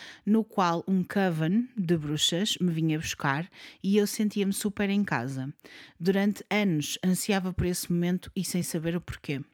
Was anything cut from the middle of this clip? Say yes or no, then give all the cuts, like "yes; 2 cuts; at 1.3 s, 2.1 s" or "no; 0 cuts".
no; 0 cuts